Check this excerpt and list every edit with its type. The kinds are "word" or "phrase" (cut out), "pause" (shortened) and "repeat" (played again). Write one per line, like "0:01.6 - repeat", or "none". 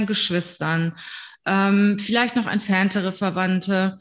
none